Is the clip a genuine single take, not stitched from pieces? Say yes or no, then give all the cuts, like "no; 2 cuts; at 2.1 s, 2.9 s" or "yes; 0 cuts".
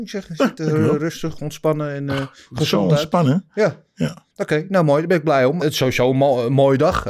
no; 2 cuts; at 4.3 s, 5.6 s